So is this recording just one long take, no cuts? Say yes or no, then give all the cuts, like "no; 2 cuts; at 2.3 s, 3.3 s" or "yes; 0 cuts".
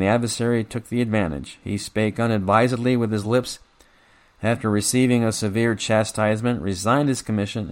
yes; 0 cuts